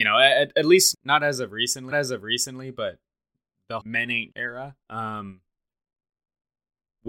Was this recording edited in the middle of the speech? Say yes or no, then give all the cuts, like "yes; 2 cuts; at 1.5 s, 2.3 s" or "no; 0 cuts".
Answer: yes; 5 cuts; at 0.9 s, 1.9 s, 3.8 s, 4.3 s, 4.8 s